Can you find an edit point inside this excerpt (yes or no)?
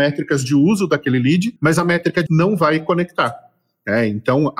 yes